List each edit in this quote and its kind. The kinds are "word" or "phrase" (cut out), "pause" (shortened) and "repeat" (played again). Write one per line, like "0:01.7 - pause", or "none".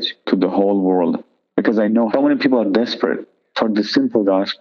0:02.1 - word